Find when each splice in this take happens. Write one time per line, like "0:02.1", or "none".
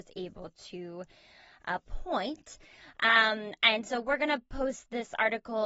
none